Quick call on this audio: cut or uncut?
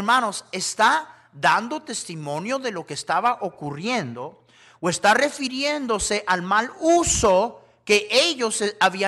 uncut